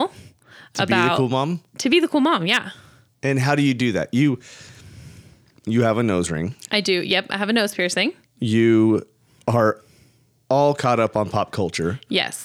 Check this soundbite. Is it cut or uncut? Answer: uncut